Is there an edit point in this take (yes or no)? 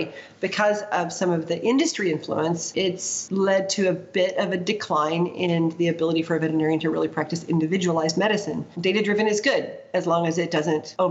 yes